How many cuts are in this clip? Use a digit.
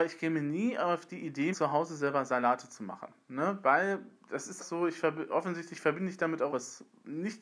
4